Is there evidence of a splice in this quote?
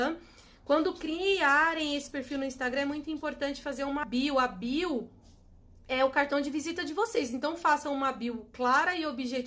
no; 0 cuts

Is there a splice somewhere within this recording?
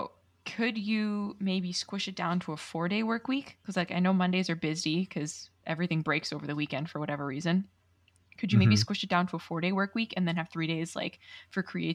no; 0 cuts

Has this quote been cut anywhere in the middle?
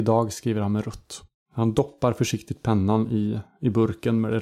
no; 0 cuts

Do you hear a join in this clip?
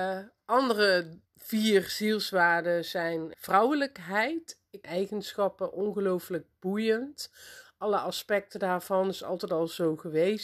yes; 3 cuts; at 1.3 s, 3.3 s, 4.8 s

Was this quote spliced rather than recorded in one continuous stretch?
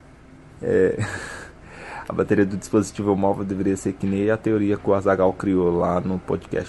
no; 0 cuts

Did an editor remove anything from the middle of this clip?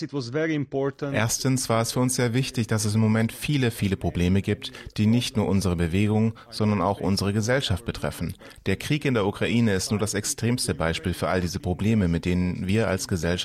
no; 0 cuts

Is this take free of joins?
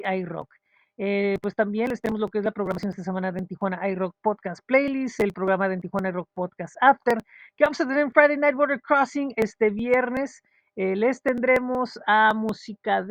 yes; 0 cuts

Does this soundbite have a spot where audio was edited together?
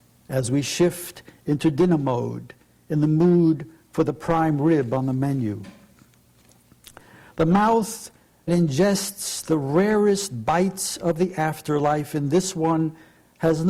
yes; 1 cut; at 8.5 s

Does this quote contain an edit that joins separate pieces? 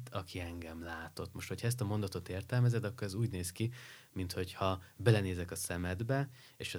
no; 0 cuts

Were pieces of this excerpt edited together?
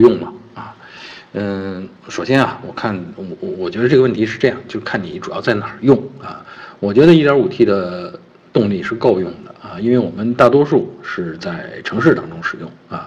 no; 0 cuts

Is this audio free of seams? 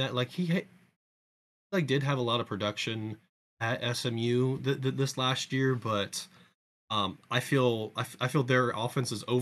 yes; 0 cuts

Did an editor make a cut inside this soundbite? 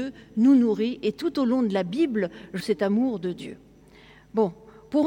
yes; 1 cut; at 2.6 s

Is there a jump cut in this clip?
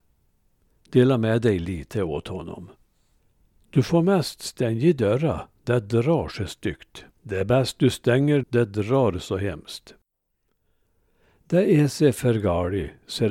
yes; 3 cuts; at 3.2 s, 7.1 s, 8.4 s

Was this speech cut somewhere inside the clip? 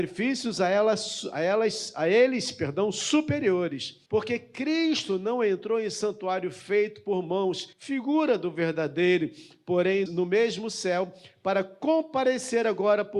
yes; 3 cuts; at 4.1 s, 7.7 s, 10.1 s

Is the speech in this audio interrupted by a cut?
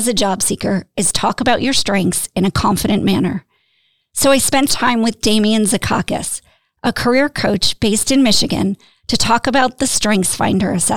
yes; 1 cut; at 4.7 s

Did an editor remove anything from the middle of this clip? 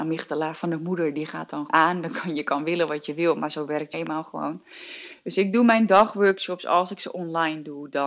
yes; 2 cuts; at 1.7 s, 3.9 s

